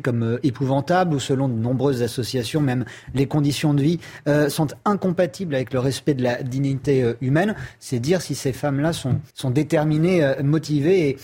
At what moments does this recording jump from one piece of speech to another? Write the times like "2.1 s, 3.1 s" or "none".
9.3 s